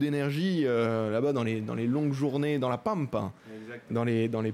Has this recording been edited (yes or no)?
no